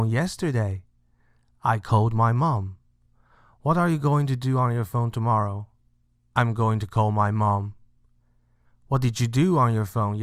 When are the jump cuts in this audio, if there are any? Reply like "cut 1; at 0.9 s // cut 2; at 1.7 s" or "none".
none